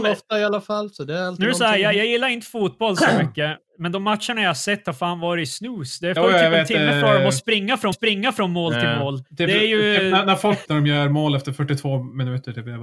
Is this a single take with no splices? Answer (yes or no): no